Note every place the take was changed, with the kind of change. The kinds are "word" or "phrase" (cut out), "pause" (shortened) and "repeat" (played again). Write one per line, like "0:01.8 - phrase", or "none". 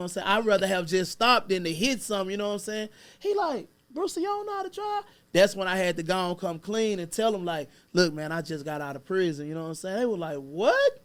none